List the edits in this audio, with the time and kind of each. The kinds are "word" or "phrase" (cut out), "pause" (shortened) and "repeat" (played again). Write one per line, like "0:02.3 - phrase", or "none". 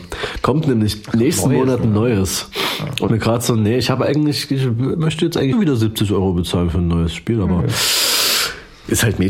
0:03.1 - phrase
0:05.5 - phrase

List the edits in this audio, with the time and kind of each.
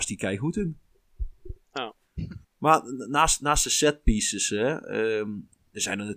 0:02.4 - pause

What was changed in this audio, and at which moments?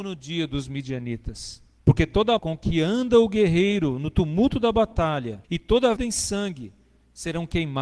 0:01.8 - pause
0:02.4 - word
0:05.4 - pause
0:06.0 - phrase

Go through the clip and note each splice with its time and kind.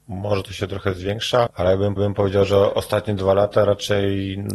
0:01.5 - word
0:02.0 - repeat

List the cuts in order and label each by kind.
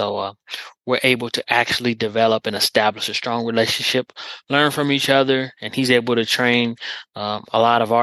none

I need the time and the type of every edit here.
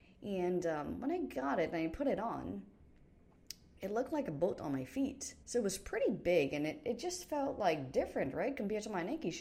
0:05.4 - pause

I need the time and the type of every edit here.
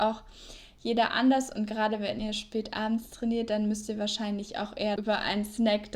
0:05.0 - word

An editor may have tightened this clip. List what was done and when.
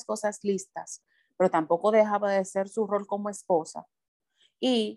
none

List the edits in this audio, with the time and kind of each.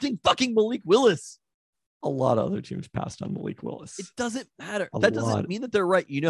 0:01.7 - pause

